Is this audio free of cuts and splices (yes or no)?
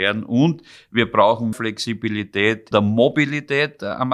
no